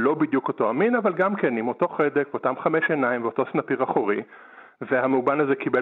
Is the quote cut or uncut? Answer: uncut